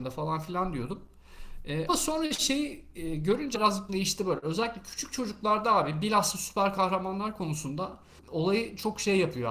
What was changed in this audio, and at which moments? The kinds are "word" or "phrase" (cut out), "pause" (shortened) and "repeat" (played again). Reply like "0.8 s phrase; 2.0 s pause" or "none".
1.9 s word; 3.5 s word; 3.9 s word; 8.2 s word